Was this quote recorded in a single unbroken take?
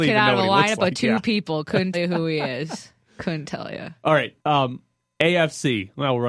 no; 2 cuts; at 1.9 s, 4.4 s

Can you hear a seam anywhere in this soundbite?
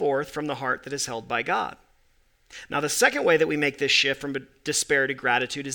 no; 0 cuts

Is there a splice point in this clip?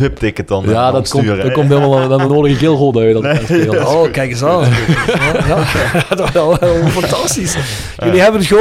yes; 1 cut; at 2.3 s

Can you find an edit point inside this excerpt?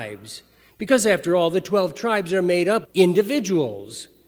yes; 1 cut; at 2.8 s

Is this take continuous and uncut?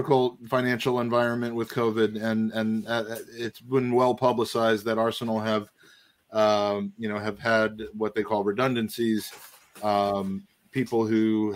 yes; 0 cuts

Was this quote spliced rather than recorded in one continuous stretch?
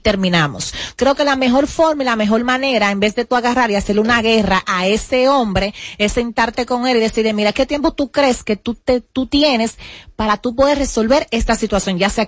no; 0 cuts

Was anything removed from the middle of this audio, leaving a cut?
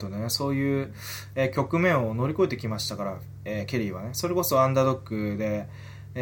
no; 0 cuts

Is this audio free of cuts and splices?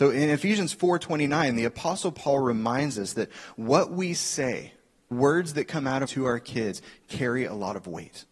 no; 2 cuts; at 5.1 s, 6.0 s

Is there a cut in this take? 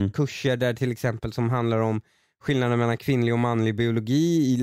no; 0 cuts

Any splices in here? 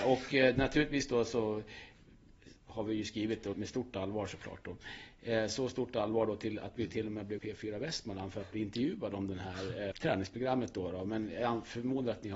yes; 4 cuts; at 2.6 s, 3.5 s, 7.4 s, 9.9 s

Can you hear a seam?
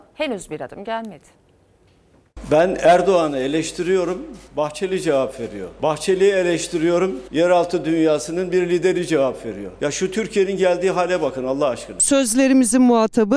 yes; 1 cut; at 4.4 s

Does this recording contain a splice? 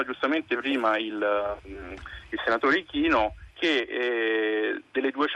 yes; 1 cut; at 3.5 s

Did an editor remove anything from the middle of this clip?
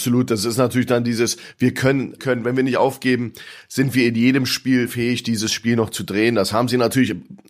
yes; 1 cut; at 2.2 s

